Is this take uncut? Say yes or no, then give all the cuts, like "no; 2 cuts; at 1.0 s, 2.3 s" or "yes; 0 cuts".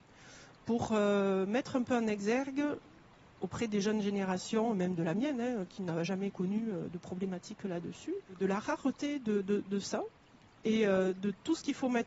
yes; 0 cuts